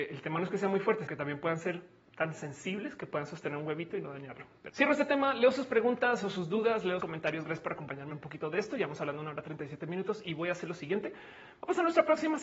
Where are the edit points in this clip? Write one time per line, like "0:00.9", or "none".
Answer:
0:01.1
0:04.7
0:07.0
0:08.1